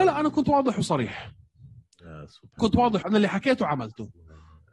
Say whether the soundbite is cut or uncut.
cut